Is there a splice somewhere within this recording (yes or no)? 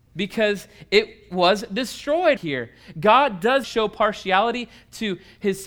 yes